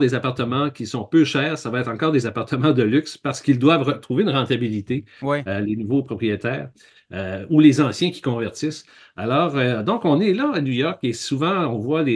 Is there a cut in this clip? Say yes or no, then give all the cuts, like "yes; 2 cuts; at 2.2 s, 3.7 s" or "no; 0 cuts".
no; 0 cuts